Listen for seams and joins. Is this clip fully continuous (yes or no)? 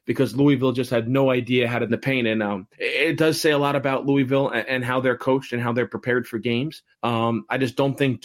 no